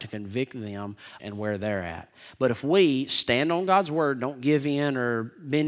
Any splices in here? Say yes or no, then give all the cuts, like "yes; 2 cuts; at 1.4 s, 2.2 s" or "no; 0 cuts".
yes; 1 cut; at 1.2 s